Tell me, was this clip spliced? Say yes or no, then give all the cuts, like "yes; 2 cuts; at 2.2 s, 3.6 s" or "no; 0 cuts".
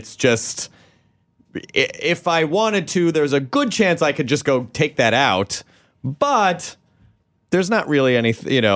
no; 0 cuts